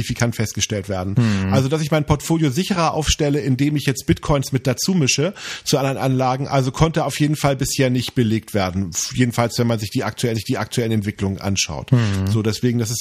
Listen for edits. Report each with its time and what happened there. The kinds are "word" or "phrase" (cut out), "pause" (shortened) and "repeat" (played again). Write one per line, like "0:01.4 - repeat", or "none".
0:10.3 - repeat